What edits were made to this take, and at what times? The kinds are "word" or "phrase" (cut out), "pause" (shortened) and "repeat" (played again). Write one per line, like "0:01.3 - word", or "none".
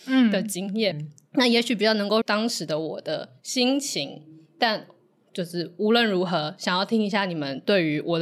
0:00.9 - word
0:02.2 - word

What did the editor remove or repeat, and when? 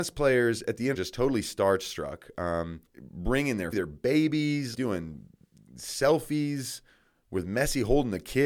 0:00.9 - phrase
0:02.9 - pause
0:03.7 - word
0:04.7 - word

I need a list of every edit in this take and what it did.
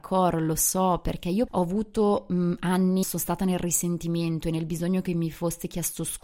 0:01.5 - phrase
0:03.0 - phrase

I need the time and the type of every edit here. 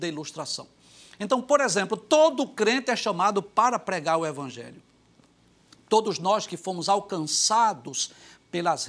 none

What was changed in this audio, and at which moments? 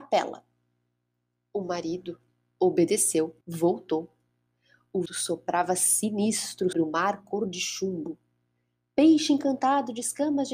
0:03.4 - pause
0:05.1 - word
0:06.7 - word

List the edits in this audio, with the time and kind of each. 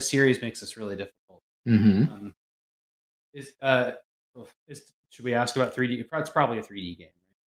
0:01.5 - pause
0:03.0 - pause
0:04.5 - pause

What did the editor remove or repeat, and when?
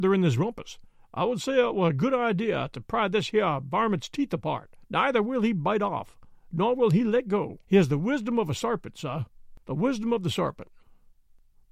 0:04.8 - pause
0:07.6 - pause
0:09.6 - pause

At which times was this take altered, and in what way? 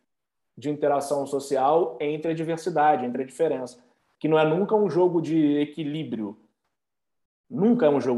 none

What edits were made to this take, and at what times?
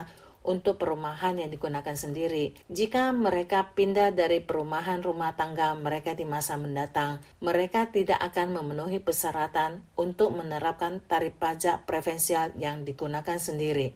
0:02.6 - pause
0:07.3 - pause

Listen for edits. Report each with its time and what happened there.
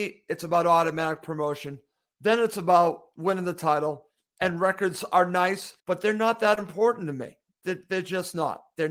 0:05.8 - pause

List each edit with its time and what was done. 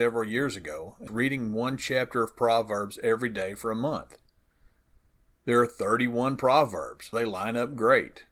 0:01.1 - word
0:07.1 - word

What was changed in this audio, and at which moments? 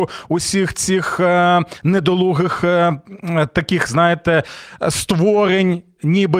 none

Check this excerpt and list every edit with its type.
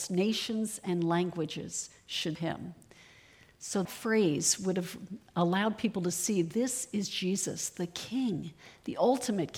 0:02.3 - word
0:03.8 - word

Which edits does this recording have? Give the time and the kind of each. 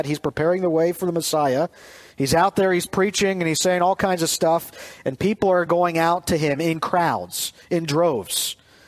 none

